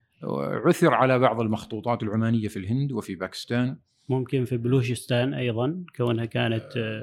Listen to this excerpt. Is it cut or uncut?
uncut